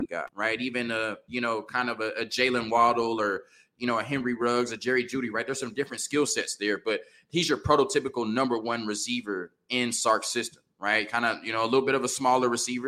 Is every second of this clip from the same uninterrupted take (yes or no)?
yes